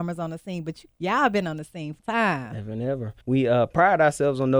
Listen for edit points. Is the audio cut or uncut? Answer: cut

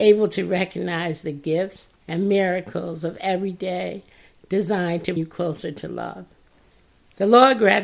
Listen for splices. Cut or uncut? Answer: cut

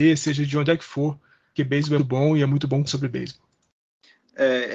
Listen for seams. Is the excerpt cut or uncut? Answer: cut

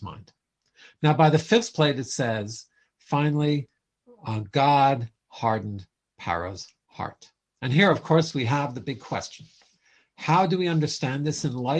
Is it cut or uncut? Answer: uncut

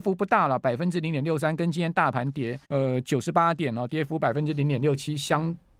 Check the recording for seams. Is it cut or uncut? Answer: cut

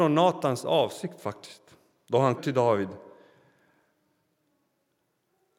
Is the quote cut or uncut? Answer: cut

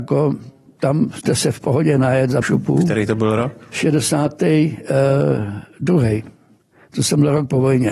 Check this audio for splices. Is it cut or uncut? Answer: cut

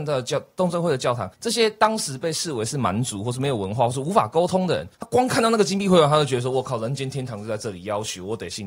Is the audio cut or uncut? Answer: cut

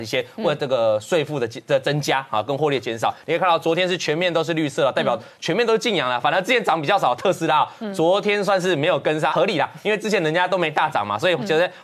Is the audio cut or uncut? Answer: cut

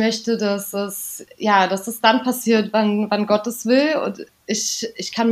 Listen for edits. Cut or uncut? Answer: uncut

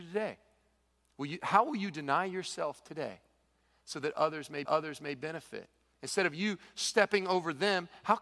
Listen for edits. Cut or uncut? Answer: cut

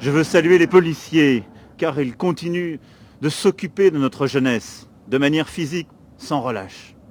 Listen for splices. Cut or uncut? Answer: uncut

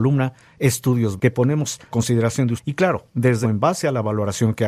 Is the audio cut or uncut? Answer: cut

